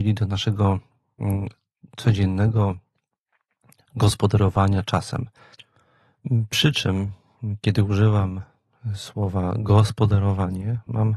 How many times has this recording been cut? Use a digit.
0